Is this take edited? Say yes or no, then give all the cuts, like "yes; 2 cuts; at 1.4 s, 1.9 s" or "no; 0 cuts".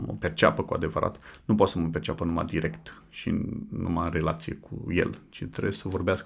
no; 0 cuts